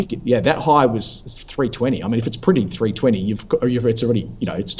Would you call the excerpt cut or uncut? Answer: uncut